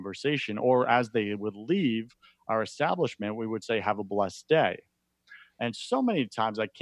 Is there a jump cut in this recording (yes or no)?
no